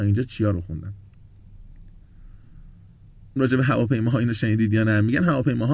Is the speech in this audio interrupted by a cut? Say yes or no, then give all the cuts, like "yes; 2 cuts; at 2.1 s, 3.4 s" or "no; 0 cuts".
yes; 1 cut; at 3.4 s